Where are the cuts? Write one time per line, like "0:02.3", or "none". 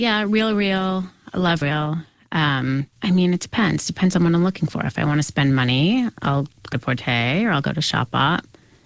0:01.6
0:02.9
0:06.7